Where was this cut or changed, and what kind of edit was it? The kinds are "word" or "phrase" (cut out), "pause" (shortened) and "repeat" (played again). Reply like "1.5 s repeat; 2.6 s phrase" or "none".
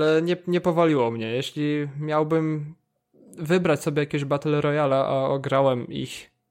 none